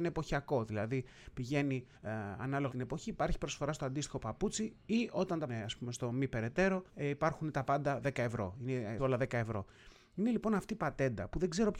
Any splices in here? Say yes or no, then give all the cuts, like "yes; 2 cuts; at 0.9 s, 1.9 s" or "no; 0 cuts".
yes; 5 cuts; at 1.9 s, 2.7 s, 5.5 s, 6.9 s, 9.0 s